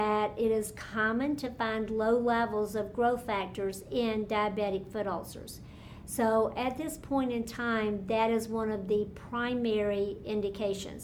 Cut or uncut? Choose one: uncut